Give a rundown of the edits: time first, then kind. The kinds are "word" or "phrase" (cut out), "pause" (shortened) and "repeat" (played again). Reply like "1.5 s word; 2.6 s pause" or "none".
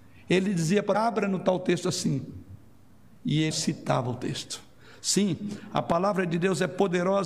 0.9 s phrase; 3.5 s word